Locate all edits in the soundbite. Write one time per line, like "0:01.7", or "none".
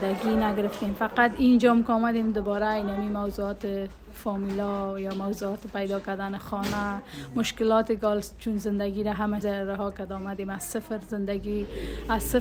0:09.4